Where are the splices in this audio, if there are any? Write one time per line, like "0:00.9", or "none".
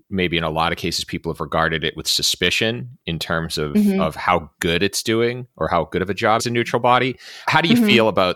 0:06.4
0:07.5

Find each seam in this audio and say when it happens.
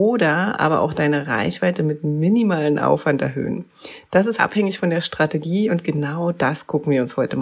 0:04.4

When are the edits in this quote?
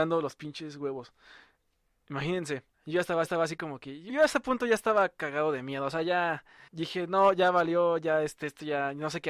0:02.7
0:03.2
0:04.1
0:06.7

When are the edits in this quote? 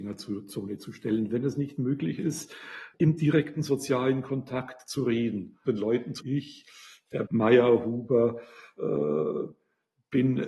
0:02.9
0:05.7
0:06.2
0:07.3

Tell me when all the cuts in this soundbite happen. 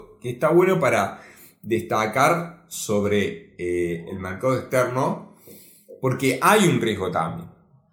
none

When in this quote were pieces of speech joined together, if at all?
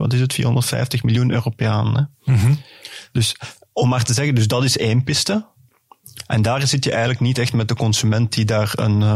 none

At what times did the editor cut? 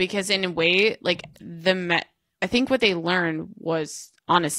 none

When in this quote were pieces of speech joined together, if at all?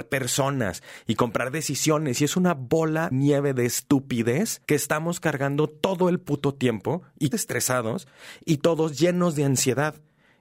0:03.1
0:04.6
0:07.3

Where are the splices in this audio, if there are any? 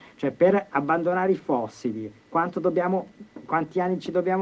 none

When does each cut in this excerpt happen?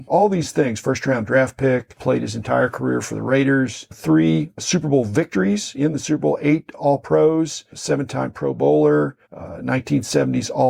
0:09.2

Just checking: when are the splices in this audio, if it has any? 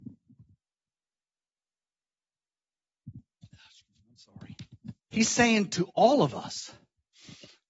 0:05.0

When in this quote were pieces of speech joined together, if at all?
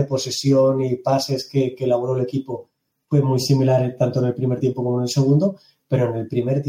none

